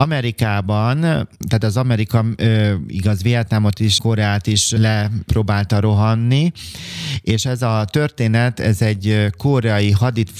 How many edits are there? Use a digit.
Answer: 1